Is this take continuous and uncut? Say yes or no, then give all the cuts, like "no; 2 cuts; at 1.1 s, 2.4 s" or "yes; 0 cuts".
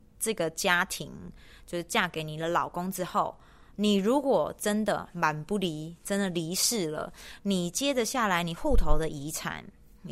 yes; 0 cuts